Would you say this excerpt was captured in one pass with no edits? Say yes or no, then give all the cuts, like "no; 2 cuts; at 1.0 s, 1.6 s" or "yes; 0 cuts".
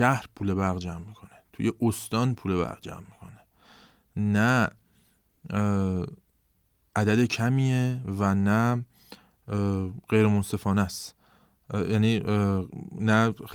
yes; 0 cuts